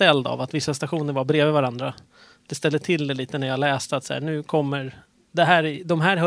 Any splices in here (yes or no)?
no